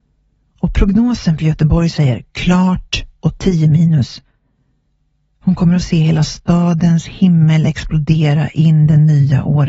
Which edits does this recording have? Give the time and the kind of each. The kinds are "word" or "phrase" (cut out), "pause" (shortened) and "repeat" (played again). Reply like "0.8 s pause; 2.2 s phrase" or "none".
none

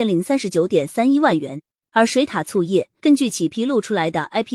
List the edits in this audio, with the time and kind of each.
3.0 s pause

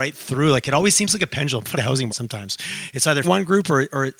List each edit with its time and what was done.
1.7 s phrase; 2.1 s word; 3.2 s word

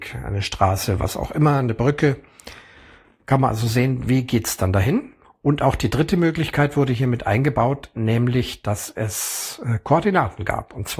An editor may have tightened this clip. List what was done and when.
5.2 s pause

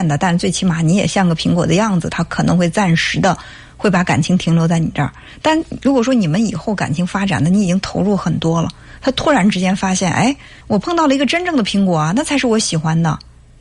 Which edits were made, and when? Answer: 10.6 s pause

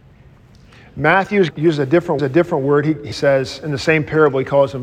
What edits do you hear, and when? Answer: 1.5 s word; 2.2 s repeat; 3.1 s word

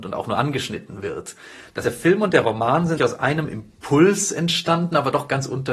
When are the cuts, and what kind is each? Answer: 1.8 s word; 3.0 s word

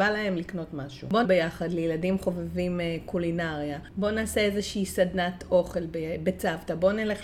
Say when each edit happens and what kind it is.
1.2 s phrase

